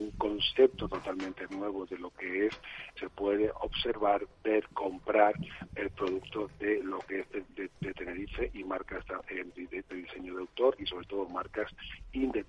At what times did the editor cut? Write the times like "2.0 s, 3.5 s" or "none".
3.0 s, 7.7 s